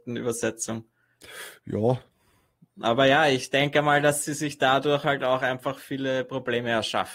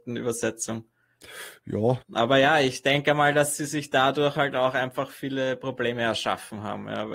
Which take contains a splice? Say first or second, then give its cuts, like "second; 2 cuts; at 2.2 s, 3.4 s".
second; 1 cut; at 2.0 s